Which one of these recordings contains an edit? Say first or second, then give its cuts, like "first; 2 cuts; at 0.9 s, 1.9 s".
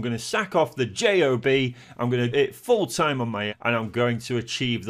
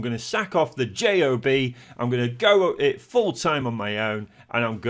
first; 2 cuts; at 2.3 s, 3.5 s